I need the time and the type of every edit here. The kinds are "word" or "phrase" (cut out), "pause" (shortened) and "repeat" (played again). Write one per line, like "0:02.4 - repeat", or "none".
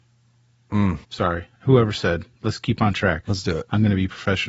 0:01.0 - pause

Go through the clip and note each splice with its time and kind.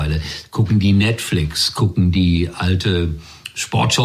none

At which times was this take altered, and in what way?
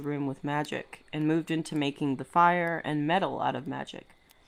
none

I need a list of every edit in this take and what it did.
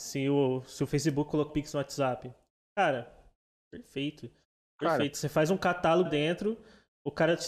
0:01.5 - word
0:06.1 - word

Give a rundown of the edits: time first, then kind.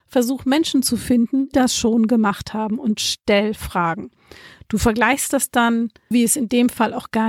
0:01.5 - word
0:06.1 - word

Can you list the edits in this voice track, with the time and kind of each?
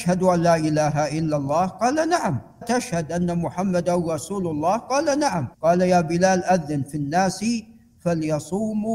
0:02.6 - word
0:05.5 - pause

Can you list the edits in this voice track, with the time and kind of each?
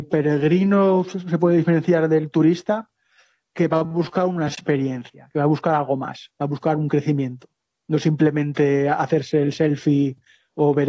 none

